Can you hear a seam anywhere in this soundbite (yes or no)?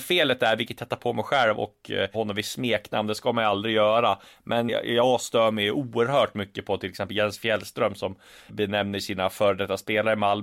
yes